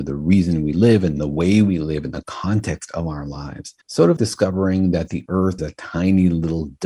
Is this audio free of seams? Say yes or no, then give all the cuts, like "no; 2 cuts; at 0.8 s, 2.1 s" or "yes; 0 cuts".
no; 3 cuts; at 3.8 s, 4.2 s, 5.6 s